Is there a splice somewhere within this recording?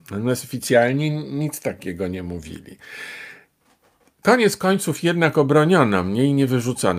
no; 0 cuts

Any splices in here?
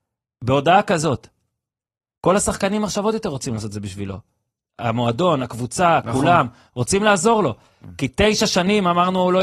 no; 0 cuts

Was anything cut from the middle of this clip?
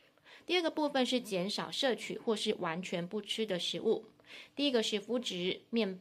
no; 0 cuts

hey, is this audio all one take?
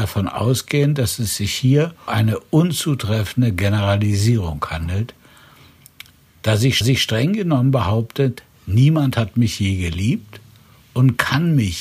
no; 2 cuts; at 2.1 s, 6.8 s

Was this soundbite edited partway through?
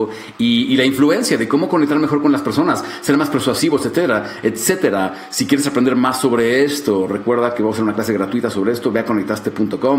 no; 0 cuts

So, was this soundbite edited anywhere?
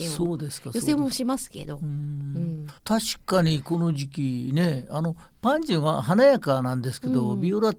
yes; 1 cut; at 2.8 s

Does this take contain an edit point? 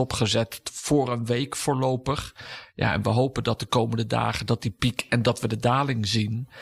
no; 0 cuts

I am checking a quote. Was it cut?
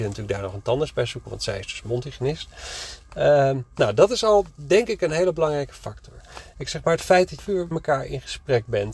yes; 3 cuts; at 4.5 s, 7.4 s, 7.7 s

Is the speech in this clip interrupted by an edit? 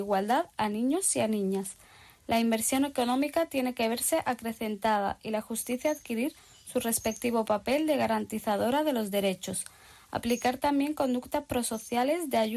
no; 0 cuts

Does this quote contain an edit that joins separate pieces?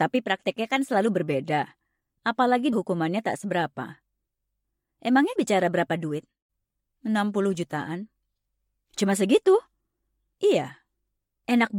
yes; 2 cuts; at 2.7 s, 5.4 s

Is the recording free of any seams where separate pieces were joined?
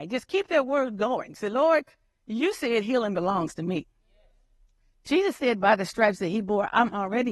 yes; 0 cuts

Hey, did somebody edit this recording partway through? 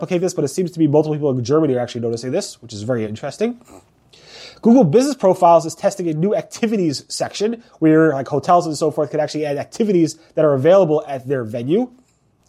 yes; 1 cut; at 3.0 s

